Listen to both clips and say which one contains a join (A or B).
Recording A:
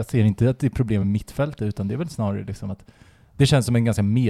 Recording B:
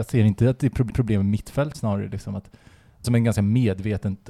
B